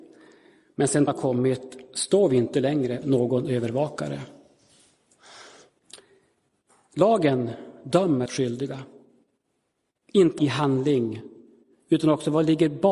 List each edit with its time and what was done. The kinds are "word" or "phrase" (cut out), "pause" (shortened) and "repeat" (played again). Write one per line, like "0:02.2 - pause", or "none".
0:01.1 - word
0:03.0 - word
0:08.3 - word
0:10.4 - word